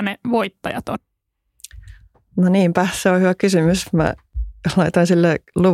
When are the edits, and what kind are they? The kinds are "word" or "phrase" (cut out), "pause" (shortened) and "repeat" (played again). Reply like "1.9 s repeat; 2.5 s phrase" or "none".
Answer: none